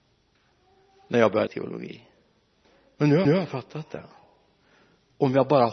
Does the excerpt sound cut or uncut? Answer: cut